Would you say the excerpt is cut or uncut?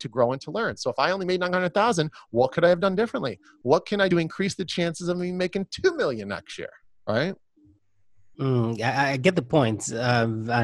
cut